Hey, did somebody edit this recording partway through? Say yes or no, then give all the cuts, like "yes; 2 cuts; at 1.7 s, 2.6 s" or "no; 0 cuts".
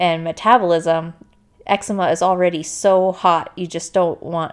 no; 0 cuts